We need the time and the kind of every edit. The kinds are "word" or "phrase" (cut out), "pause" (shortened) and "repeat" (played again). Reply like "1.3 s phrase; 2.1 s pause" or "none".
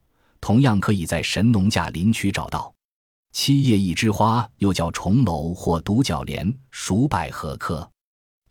none